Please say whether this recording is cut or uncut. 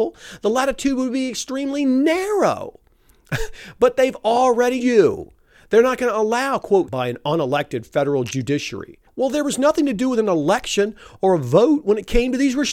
cut